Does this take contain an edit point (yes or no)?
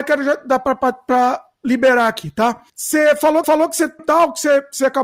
yes